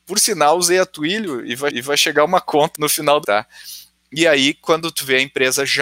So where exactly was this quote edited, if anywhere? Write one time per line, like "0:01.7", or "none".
0:01.7
0:02.7
0:03.2